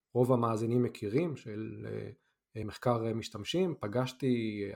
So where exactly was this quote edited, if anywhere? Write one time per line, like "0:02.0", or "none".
none